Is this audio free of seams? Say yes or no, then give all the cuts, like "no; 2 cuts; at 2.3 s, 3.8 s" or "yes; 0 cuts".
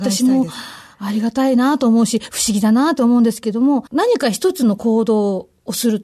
no; 1 cut; at 3.9 s